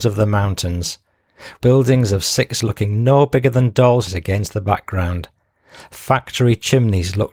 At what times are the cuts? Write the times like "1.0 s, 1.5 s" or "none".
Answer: 1.6 s, 2.6 s, 4.1 s